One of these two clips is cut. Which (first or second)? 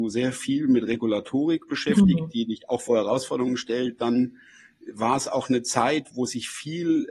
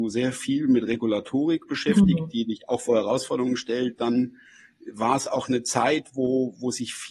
first